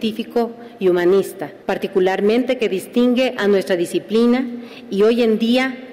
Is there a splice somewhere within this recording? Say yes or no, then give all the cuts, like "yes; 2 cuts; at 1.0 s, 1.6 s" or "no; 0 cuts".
no; 0 cuts